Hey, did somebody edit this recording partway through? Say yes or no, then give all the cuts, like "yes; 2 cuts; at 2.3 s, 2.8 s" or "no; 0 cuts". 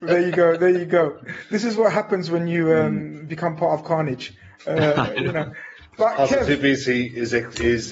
no; 0 cuts